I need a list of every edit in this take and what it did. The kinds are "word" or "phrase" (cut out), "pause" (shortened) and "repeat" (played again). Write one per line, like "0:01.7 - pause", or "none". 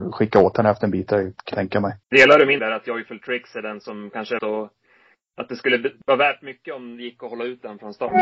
0:01.5 - word
0:02.0 - pause
0:02.6 - word
0:04.4 - phrase
0:06.0 - pause

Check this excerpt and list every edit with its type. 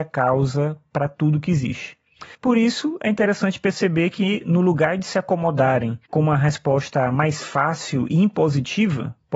0:02.3 - pause
0:06.1 - pause

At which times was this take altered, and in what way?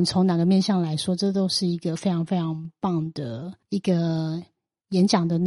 0:03.6 - pause

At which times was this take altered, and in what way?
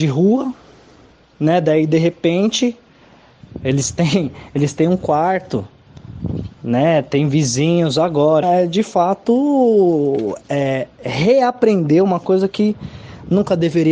0:08.4 - word

